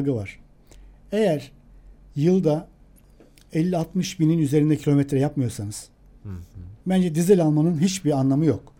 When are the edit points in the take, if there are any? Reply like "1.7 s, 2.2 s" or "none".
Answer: 6.8 s

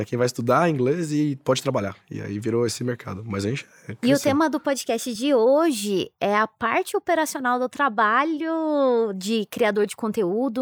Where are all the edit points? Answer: none

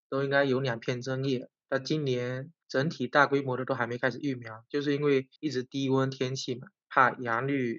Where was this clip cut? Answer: 2.6 s, 5.4 s

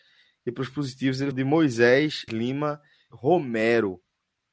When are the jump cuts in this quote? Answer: 1.3 s, 2.3 s, 3.1 s

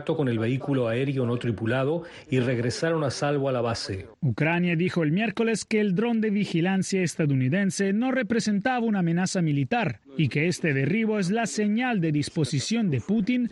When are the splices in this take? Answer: none

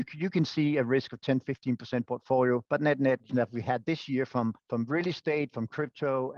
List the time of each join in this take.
2.0 s, 2.6 s, 3.3 s, 4.6 s

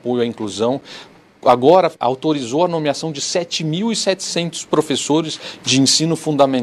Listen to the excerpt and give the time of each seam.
2.0 s

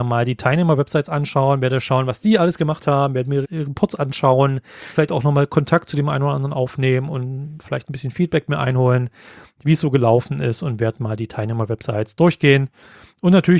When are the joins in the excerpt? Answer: 3.4 s, 4.9 s

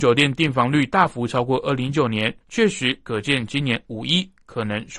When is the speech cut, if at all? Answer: 2.4 s

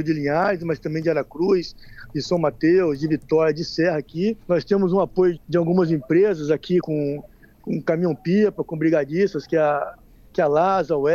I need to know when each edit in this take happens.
4.4 s, 5.4 s, 6.8 s

